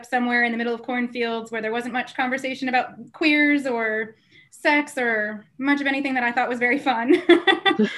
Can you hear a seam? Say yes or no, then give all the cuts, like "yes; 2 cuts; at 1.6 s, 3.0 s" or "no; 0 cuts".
no; 0 cuts